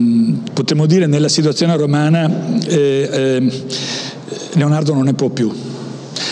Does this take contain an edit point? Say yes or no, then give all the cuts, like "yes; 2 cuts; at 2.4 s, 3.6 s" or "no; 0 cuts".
no; 0 cuts